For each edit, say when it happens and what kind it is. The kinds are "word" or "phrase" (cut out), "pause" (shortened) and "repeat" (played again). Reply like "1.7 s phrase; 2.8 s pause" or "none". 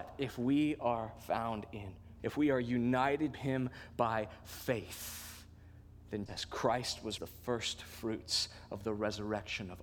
2.2 s word; 3.3 s word; 6.3 s word; 7.2 s phrase